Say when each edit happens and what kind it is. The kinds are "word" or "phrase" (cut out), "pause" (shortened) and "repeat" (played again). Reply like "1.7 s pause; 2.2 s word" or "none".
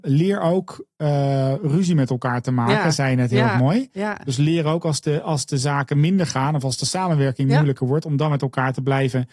none